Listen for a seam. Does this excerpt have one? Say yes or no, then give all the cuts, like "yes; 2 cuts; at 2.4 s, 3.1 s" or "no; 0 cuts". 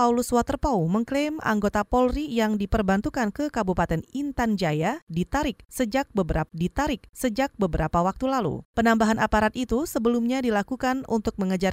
yes; 1 cut; at 6.5 s